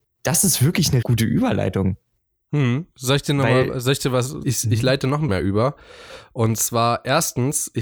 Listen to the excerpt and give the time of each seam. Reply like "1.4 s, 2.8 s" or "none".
1.0 s, 4.4 s, 5.3 s